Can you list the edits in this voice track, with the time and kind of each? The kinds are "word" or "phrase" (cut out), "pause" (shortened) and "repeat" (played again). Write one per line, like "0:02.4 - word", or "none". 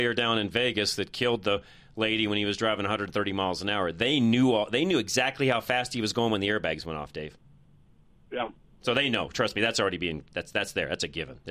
none